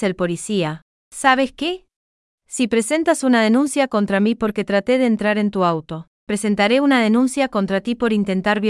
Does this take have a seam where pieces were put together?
yes; 1 cut; at 2.4 s

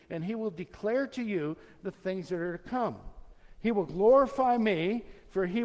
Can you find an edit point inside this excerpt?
no; 0 cuts

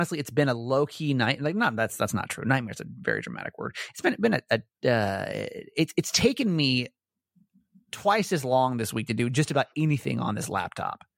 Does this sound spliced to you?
no; 0 cuts

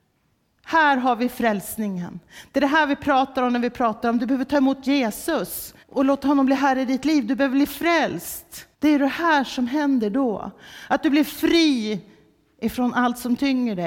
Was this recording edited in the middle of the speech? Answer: yes; 2 cuts; at 5.8 s, 8.7 s

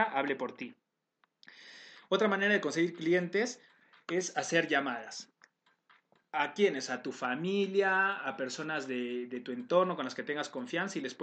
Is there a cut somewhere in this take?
no; 0 cuts

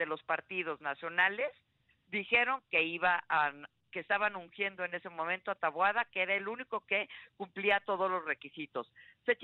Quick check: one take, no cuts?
yes; 0 cuts

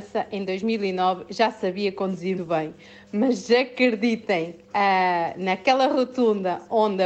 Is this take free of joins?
no; 2 cuts; at 2.4 s, 4.6 s

